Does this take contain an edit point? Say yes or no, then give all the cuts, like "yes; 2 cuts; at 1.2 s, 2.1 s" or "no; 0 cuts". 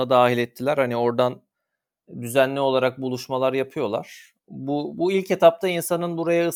yes; 1 cut; at 4.4 s